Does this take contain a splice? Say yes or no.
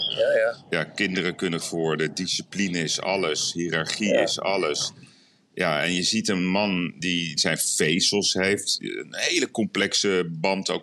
yes